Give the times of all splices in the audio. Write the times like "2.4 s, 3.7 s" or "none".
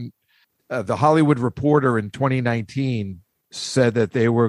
3.4 s